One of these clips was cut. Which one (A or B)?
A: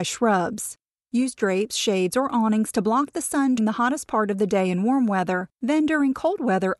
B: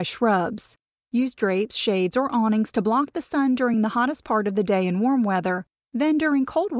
A